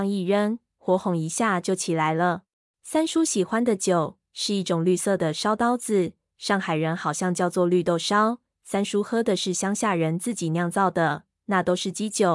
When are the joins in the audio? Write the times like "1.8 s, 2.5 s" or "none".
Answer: 2.6 s